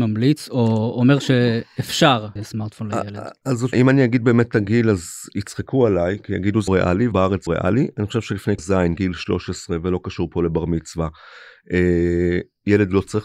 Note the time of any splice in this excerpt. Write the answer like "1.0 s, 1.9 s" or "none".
2.4 s, 3.7 s, 6.7 s, 7.1 s, 7.5 s, 8.6 s